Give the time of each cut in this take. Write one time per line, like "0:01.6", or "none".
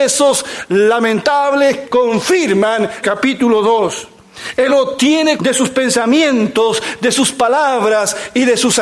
0:01.8
0:03.0
0:04.7
0:05.4